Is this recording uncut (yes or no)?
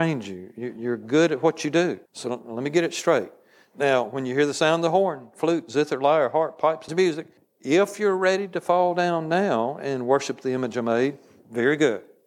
no